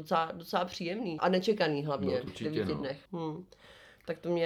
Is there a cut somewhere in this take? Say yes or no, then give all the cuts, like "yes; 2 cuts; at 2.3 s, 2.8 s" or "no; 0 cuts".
yes; 3 cuts; at 1.2 s, 2.3 s, 3.1 s